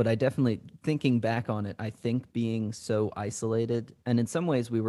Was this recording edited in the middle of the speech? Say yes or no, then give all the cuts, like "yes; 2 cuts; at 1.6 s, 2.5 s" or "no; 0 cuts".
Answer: no; 0 cuts